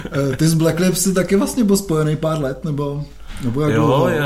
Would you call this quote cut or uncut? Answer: uncut